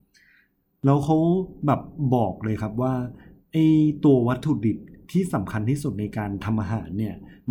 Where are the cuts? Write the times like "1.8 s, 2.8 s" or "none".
none